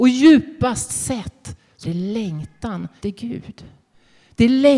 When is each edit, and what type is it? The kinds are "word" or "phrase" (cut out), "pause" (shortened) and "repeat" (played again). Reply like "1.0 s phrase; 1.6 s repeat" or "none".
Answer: 1.8 s word; 3.0 s word